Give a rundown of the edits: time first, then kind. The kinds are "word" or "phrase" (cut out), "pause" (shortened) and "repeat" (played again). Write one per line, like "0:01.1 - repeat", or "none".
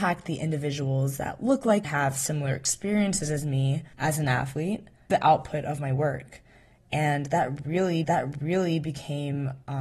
0:01.8 - phrase
0:03.9 - pause
0:05.1 - word
0:08.0 - repeat